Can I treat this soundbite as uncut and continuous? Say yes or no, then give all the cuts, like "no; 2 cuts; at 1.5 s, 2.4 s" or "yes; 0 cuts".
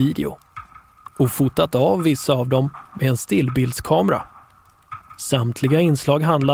yes; 0 cuts